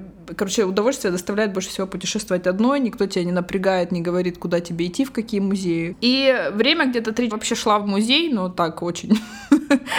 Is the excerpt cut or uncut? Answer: cut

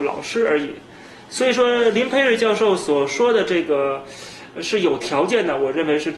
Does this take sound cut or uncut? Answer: uncut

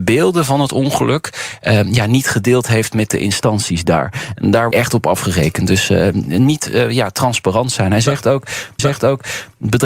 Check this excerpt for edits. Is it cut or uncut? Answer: cut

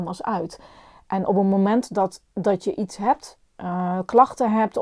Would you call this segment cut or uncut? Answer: uncut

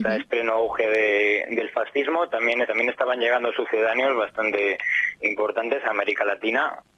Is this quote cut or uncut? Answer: cut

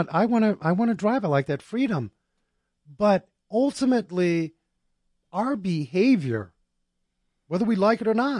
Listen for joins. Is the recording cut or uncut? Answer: uncut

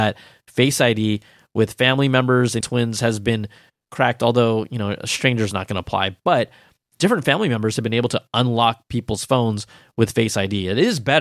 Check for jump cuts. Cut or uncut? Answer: cut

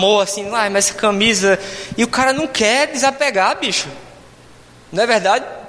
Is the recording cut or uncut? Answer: uncut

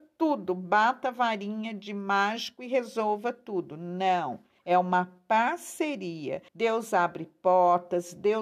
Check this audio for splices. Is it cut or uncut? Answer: cut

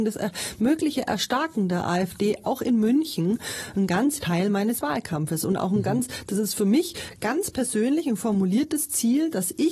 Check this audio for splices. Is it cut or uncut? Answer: cut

